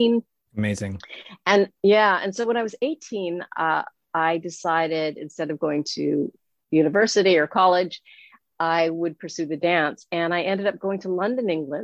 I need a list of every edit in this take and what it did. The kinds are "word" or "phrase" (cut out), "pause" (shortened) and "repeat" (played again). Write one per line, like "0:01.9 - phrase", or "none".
none